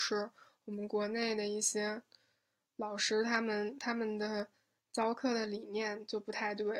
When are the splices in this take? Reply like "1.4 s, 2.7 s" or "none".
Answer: none

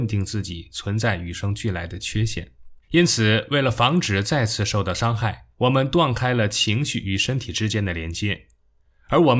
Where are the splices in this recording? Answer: 2.8 s, 5.5 s

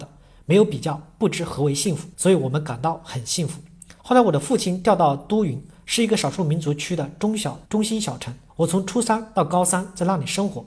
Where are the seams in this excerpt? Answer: 2.1 s, 4.0 s, 7.7 s, 8.5 s

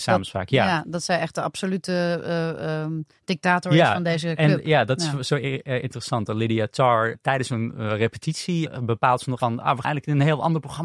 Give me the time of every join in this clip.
9.4 s, 9.8 s

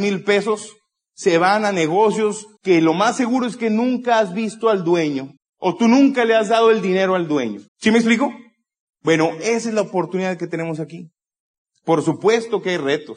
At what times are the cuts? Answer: 2.6 s, 5.4 s, 7.7 s

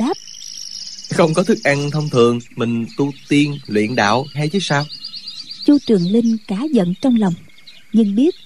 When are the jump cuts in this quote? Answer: 2.5 s, 4.3 s

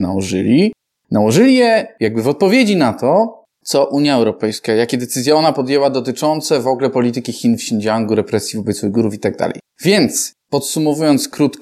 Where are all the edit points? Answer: none

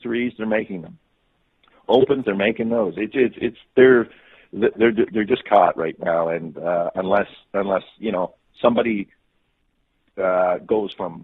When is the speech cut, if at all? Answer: 2.2 s

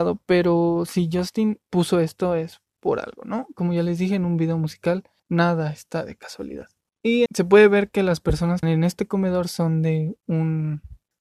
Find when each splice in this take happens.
1.7 s, 5.2 s, 7.3 s, 8.6 s

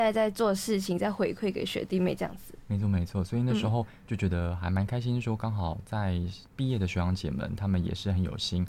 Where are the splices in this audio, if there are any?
6.5 s

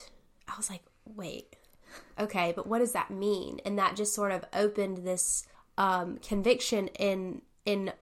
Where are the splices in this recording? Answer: 1.0 s, 5.5 s

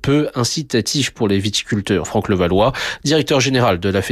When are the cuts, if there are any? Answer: 2.0 s

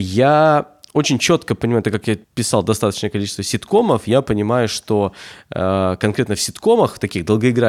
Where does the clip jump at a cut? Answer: 2.2 s

